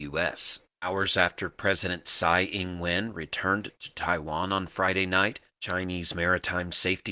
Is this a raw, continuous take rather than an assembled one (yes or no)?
yes